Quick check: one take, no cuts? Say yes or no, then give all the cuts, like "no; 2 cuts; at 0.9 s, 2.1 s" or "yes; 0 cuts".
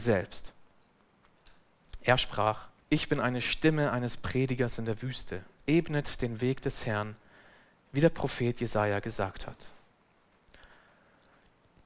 no; 2 cuts; at 2.8 s, 5.6 s